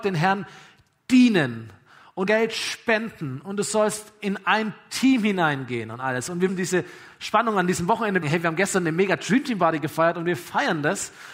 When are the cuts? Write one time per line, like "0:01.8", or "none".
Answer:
0:02.3
0:06.5
0:08.2